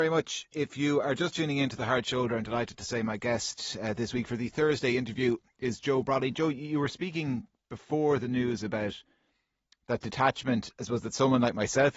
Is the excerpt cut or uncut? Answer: uncut